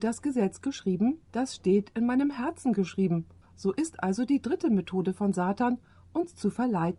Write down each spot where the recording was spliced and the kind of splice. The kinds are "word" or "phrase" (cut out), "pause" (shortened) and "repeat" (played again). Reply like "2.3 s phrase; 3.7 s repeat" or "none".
1.3 s pause; 3.4 s pause